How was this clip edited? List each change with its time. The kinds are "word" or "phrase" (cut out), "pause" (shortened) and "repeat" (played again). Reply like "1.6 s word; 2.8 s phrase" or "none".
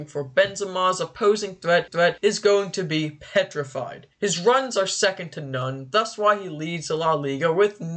1.9 s repeat